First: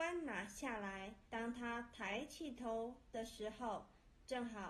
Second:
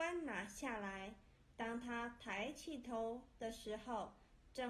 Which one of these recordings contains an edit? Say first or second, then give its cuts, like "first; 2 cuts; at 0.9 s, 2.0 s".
first; 1 cut; at 1.2 s